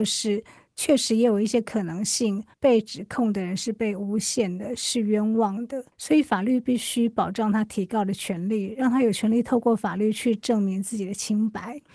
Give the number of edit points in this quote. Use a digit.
2